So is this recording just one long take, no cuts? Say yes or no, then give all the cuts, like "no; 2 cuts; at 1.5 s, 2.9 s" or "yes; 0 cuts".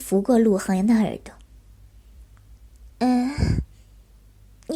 no; 1 cut; at 2.9 s